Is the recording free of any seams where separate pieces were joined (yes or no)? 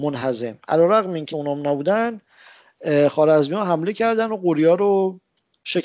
no